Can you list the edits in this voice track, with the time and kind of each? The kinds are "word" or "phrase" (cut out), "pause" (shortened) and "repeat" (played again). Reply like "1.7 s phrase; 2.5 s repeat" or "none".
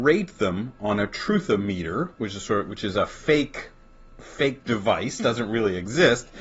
none